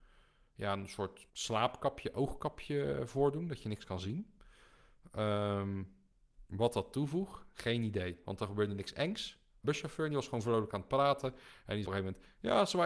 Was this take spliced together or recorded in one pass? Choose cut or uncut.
cut